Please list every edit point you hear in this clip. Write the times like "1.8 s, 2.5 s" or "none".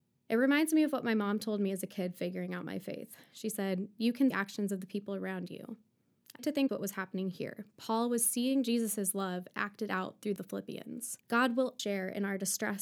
4.3 s, 6.4 s, 6.7 s, 10.4 s, 11.2 s, 11.8 s